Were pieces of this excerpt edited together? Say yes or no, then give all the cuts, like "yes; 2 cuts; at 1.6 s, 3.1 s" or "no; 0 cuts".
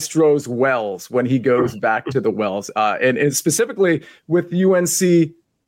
no; 0 cuts